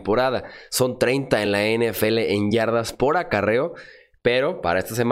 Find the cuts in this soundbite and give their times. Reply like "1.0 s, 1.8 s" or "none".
none